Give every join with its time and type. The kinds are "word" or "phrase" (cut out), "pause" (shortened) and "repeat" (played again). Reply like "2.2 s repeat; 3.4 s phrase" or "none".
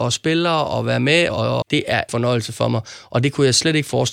1.3 s word; 1.6 s phrase; 2.1 s phrase